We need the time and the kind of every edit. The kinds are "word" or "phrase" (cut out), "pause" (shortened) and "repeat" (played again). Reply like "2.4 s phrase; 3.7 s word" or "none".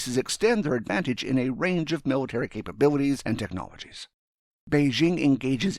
4.4 s pause